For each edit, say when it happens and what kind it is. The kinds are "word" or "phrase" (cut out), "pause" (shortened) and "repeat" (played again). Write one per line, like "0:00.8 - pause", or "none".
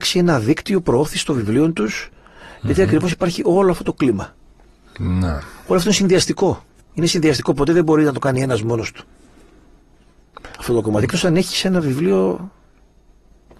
0:06.8 - pause